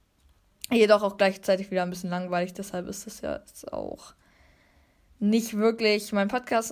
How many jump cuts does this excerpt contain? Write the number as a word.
zero